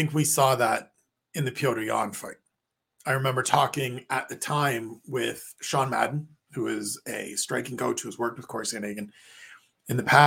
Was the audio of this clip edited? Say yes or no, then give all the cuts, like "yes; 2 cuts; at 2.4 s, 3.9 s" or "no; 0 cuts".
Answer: no; 0 cuts